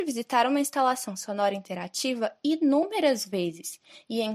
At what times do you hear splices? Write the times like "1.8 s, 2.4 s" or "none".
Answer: none